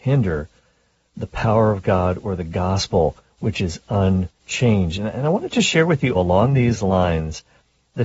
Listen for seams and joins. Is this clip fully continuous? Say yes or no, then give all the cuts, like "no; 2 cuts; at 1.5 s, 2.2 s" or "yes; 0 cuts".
no; 2 cuts; at 4.4 s, 6.1 s